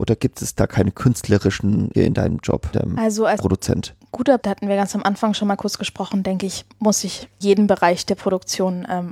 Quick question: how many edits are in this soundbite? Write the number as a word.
five